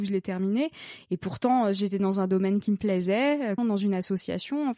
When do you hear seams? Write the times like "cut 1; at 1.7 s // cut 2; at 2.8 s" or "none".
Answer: cut 1; at 3.6 s